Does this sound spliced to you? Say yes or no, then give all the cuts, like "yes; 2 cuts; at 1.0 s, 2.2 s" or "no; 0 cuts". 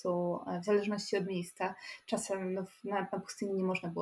no; 0 cuts